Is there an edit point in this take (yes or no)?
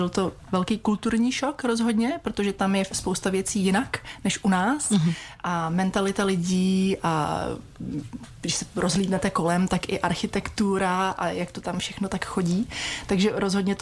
no